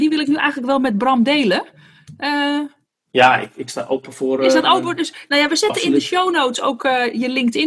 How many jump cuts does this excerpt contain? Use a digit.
1